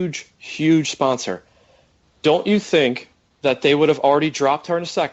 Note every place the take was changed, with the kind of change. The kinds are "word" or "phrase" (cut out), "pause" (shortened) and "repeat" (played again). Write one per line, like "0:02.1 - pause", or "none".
0:03.3 - pause